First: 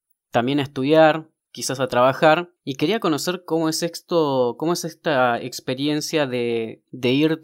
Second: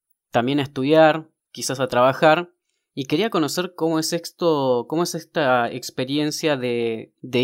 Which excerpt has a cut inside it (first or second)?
first